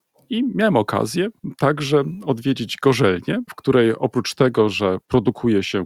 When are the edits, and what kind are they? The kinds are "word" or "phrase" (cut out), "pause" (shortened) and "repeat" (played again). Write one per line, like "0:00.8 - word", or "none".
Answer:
none